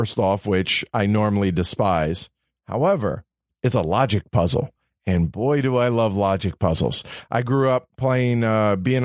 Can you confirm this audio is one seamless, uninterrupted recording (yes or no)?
yes